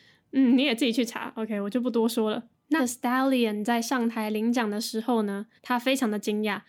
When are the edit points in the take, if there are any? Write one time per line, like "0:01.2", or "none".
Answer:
0:02.8
0:05.6